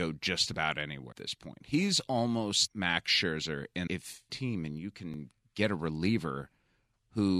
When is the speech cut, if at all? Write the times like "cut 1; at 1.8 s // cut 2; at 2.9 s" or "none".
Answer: cut 1; at 1.1 s // cut 2; at 2.7 s // cut 3; at 3.9 s // cut 4; at 4.3 s